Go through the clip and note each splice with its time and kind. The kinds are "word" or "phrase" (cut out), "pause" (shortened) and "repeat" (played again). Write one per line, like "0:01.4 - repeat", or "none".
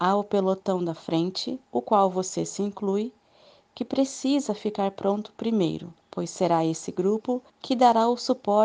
0:01.7 - pause
0:06.0 - pause
0:07.5 - pause